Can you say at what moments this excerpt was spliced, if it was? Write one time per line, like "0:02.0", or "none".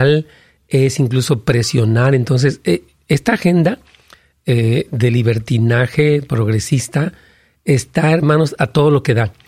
none